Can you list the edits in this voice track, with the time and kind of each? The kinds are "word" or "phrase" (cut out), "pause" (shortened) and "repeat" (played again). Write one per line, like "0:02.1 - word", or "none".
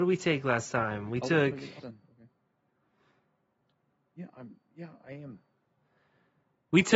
0:01.8 - word

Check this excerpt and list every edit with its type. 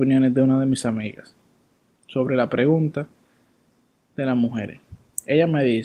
none

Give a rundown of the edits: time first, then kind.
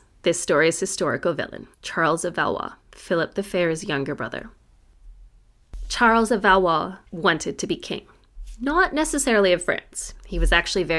0:01.7 - pause
0:02.8 - pause
0:07.1 - pause

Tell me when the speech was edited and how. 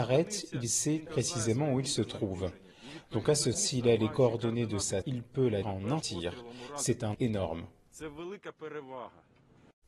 0:01.1 - word
0:03.5 - word
0:05.0 - word
0:05.6 - word
0:06.0 - word
0:07.1 - word

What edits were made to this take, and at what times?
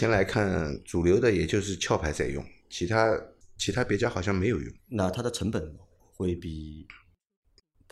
0:04.8 - pause

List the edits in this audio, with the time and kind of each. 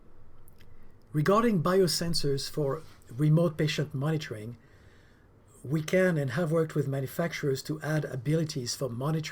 none

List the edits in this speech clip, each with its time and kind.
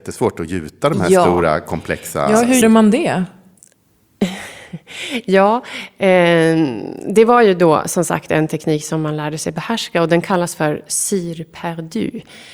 0:02.6 - word

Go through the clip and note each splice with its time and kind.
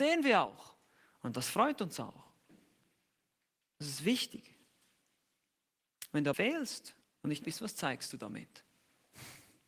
0:06.3 - phrase
0:07.0 - pause
0:07.4 - word

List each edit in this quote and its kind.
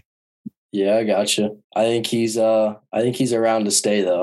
0:01.6 - pause

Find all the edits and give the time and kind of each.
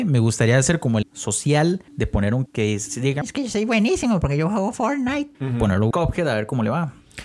0:01.0 - word
0:01.9 - pause
0:02.5 - word
0:03.2 - word
0:05.3 - pause
0:05.9 - word

